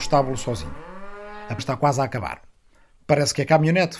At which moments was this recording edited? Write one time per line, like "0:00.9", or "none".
0:01.6